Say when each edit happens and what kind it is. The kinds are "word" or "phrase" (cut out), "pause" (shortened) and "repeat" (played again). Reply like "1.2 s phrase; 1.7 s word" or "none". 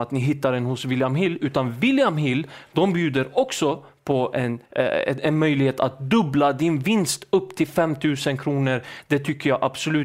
4.6 s pause